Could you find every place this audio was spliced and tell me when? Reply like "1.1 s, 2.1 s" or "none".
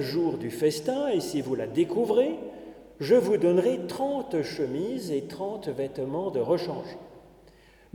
none